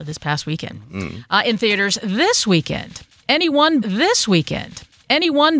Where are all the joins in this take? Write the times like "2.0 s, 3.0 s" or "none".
3.8 s

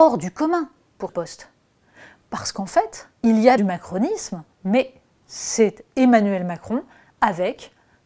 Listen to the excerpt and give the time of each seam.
1.1 s, 3.2 s, 3.6 s, 4.5 s

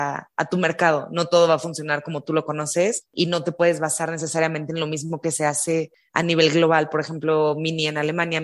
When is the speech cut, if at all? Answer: none

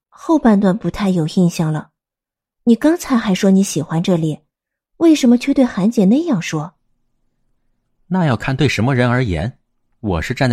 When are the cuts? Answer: none

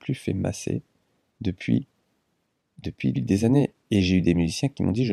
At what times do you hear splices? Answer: 3.1 s

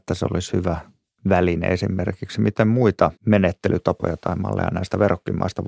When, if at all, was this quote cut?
3.2 s

